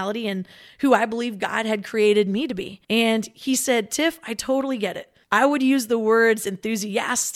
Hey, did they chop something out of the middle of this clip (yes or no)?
yes